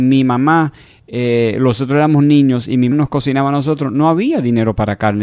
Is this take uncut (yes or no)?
no